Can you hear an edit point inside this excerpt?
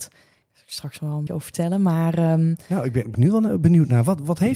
yes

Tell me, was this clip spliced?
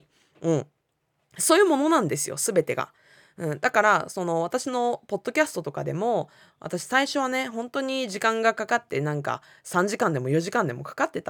no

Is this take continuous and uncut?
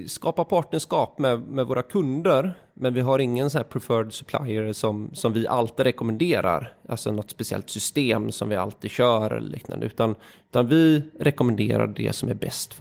yes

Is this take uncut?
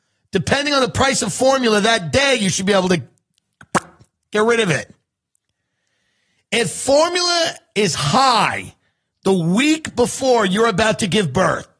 yes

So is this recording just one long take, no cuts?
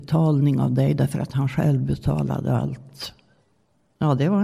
no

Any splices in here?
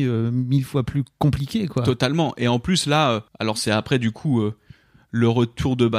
yes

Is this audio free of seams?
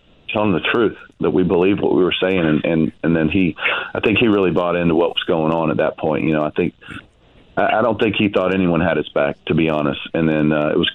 yes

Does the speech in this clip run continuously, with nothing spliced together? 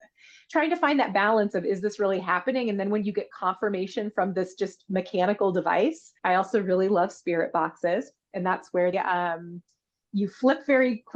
no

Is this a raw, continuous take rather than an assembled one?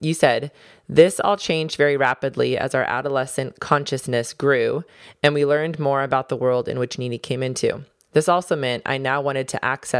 yes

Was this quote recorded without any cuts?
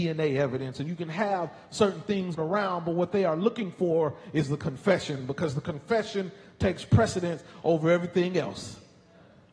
no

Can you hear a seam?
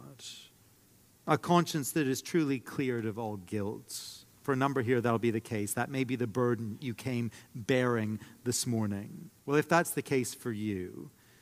yes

